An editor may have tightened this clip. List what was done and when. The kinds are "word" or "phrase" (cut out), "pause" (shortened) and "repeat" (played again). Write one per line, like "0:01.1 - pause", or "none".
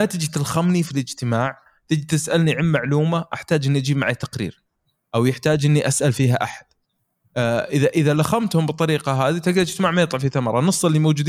none